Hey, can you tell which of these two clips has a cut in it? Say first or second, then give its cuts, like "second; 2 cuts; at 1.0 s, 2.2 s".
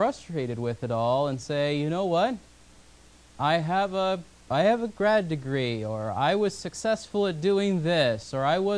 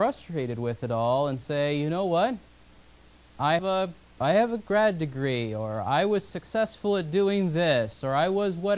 second; 1 cut; at 3.6 s